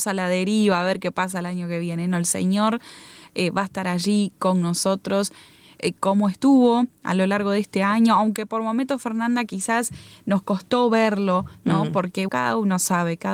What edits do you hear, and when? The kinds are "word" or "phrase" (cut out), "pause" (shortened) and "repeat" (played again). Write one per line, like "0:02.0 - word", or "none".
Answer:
0:12.3 - word